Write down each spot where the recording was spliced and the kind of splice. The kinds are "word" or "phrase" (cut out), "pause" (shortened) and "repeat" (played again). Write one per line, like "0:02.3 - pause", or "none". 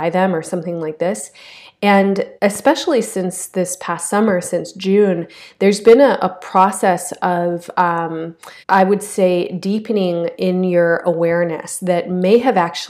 0:02.4 - pause
0:08.6 - pause